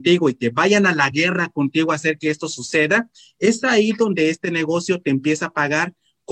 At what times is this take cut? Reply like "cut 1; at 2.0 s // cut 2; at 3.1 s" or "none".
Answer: none